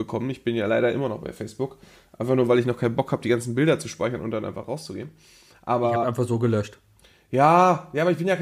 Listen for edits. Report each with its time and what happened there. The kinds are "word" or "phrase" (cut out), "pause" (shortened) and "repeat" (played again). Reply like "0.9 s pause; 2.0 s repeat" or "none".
none